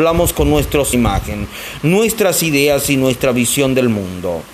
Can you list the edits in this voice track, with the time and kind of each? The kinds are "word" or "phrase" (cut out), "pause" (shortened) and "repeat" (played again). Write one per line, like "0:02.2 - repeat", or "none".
0:00.9 - phrase

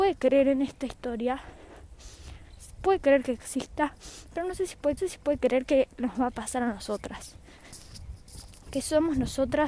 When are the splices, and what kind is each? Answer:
0:05.0 - repeat

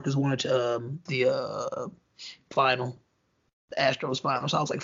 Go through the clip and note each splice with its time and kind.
0:01.1 - word
0:02.5 - word

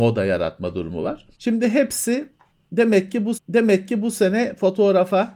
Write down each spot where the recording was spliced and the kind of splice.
0:01.3 - pause
0:03.3 - repeat

